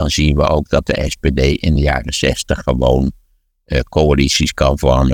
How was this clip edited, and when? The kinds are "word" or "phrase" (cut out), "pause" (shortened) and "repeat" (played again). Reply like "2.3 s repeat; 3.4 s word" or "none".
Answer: none